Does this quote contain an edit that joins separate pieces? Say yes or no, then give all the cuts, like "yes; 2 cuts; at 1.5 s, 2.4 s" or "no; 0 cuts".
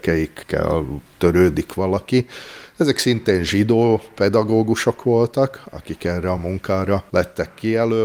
no; 0 cuts